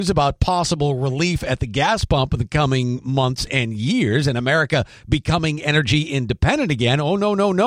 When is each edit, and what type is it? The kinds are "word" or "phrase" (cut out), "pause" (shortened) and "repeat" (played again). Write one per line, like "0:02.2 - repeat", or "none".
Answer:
none